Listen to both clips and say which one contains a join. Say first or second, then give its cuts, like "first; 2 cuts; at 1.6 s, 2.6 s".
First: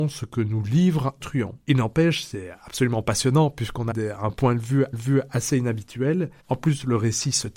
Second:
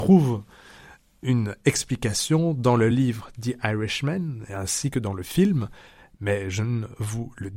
first; 5 cuts; at 1.2 s, 1.6 s, 3.9 s, 4.9 s, 6.4 s